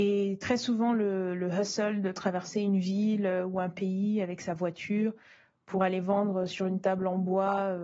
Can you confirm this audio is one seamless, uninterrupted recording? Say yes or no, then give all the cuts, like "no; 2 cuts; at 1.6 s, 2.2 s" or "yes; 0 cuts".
yes; 0 cuts